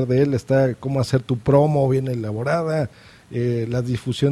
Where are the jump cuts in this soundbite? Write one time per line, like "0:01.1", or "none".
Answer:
none